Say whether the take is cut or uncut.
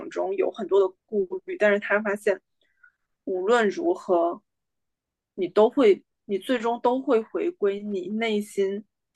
cut